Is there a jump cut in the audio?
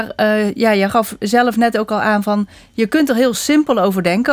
no; 0 cuts

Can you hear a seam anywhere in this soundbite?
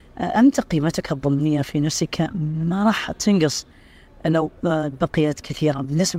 no; 0 cuts

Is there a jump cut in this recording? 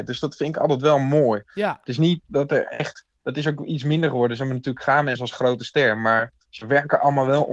yes; 2 cuts; at 2.2 s, 6.4 s

